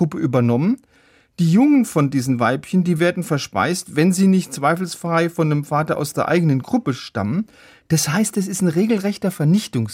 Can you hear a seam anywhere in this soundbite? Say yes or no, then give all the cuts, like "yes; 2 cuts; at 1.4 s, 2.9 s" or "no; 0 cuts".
no; 0 cuts